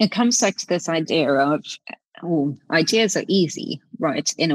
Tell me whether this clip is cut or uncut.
uncut